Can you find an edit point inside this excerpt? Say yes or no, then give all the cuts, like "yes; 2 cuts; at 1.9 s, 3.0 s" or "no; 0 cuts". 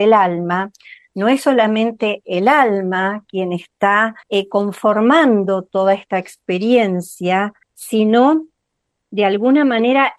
yes; 2 cuts; at 4.2 s, 7.6 s